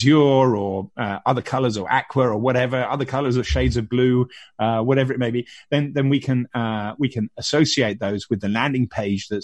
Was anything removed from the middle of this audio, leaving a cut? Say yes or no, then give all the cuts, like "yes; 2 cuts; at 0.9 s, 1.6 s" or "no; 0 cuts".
no; 0 cuts